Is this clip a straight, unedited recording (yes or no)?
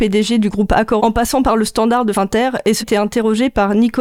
no